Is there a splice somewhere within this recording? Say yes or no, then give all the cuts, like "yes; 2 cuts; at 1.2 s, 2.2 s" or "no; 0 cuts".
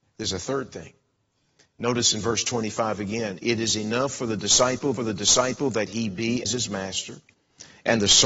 yes; 2 cuts; at 5.0 s, 6.4 s